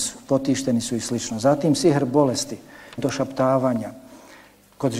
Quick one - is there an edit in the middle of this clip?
yes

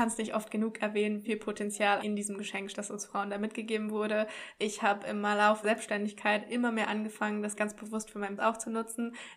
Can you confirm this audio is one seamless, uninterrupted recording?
no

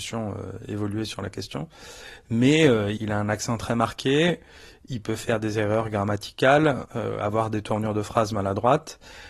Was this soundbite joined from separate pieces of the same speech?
yes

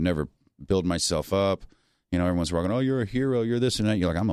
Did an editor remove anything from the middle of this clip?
no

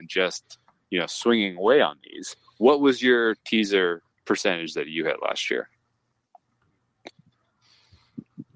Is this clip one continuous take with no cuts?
no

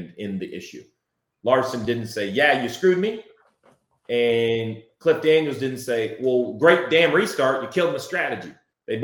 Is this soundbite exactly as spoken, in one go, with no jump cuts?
yes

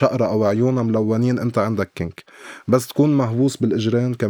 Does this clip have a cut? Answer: no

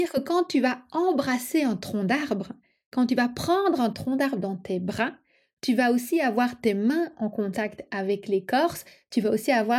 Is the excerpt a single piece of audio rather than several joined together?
yes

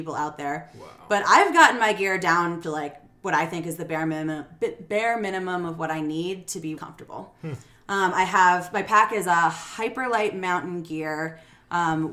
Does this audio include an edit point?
yes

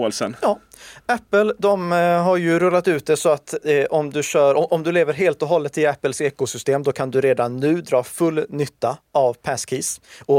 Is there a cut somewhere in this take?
no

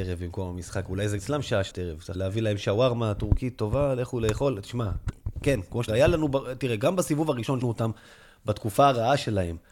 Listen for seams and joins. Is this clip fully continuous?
no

